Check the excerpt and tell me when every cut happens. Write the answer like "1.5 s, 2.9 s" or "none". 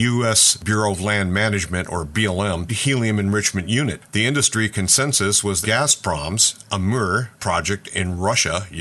2.7 s, 5.6 s